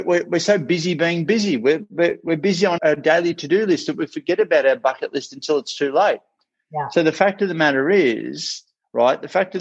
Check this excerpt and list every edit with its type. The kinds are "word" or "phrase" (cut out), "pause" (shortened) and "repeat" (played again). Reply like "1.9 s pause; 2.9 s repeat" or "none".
2.8 s word